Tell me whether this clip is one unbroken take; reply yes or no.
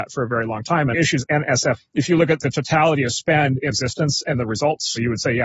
no